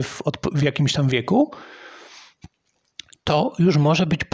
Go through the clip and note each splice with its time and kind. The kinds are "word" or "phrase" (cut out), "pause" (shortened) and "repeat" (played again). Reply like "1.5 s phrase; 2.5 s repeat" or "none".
none